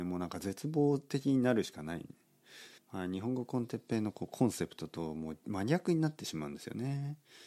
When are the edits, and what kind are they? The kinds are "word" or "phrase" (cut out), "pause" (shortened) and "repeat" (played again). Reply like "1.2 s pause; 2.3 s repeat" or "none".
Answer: 2.8 s pause